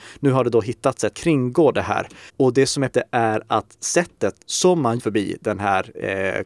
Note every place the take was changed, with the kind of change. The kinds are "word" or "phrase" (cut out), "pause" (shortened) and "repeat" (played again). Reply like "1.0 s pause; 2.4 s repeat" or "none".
1.1 s phrase; 2.3 s pause; 2.9 s word; 4.4 s pause; 5.0 s phrase